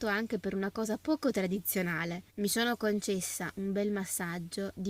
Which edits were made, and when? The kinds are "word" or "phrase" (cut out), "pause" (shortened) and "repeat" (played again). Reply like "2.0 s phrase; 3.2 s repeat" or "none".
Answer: 2.3 s pause